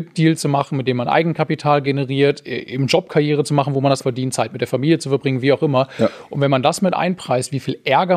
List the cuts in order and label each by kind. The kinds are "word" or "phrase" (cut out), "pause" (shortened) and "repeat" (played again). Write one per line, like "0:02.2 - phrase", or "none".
0:04.0 - word